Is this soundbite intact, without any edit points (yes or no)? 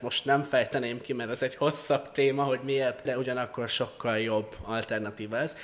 no